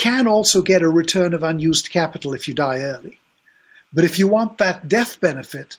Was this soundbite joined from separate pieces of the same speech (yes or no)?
no